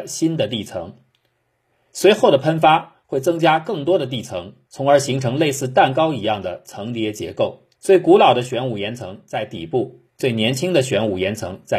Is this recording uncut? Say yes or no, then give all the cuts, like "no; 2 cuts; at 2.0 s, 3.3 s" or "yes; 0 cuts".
no; 3 cuts; at 4.6 s, 7.7 s, 10.1 s